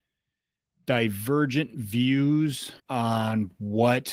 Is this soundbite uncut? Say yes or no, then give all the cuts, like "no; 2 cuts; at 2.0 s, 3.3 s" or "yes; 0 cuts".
no; 1 cut; at 2.8 s